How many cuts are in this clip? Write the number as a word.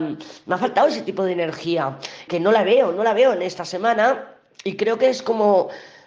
one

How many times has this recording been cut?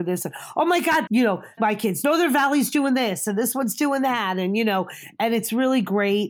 two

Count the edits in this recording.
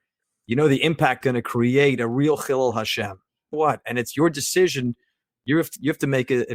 two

